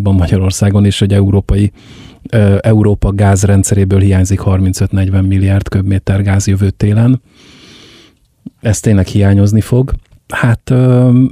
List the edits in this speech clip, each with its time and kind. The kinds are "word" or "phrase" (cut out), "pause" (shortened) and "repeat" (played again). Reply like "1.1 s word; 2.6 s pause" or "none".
10.2 s pause